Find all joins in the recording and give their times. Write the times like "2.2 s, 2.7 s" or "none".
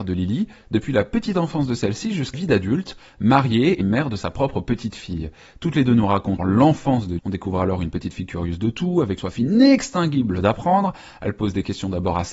2.3 s, 3.8 s, 6.4 s, 7.2 s, 9.2 s